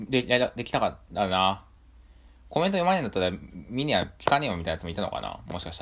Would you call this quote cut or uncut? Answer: uncut